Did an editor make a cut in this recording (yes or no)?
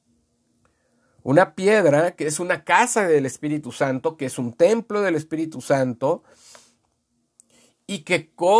no